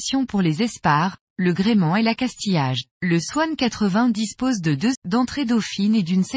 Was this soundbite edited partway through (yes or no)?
yes